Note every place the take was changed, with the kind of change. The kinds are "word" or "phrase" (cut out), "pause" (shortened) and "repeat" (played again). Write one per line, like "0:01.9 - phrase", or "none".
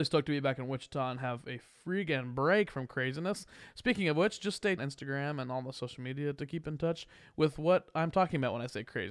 0:04.8 - phrase

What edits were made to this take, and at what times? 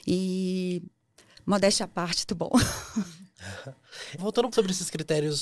0:02.3 - word
0:04.2 - word
0:04.5 - word

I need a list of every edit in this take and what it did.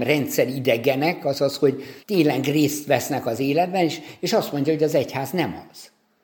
0:02.0 - pause

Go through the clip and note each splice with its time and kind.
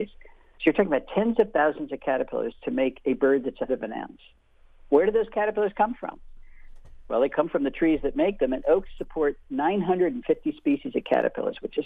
0:03.7 - word

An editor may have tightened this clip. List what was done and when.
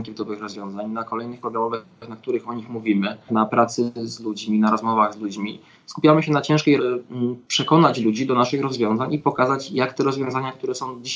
0:01.4 - word
0:03.3 - phrase
0:06.8 - phrase
0:07.4 - pause

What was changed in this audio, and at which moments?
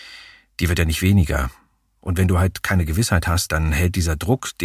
0:03.5 - word

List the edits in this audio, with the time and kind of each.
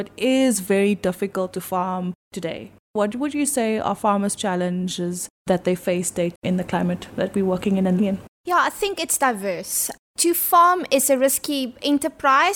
0:04.4 - word
0:06.3 - word
0:08.0 - word

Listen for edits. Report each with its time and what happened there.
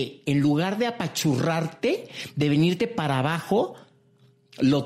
none

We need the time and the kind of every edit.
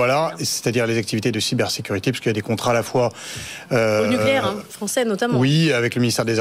none

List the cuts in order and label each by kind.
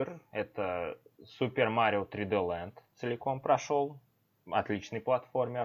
none

